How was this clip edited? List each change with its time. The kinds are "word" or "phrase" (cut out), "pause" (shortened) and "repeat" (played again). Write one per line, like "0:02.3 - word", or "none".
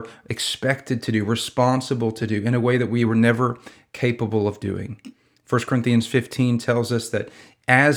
none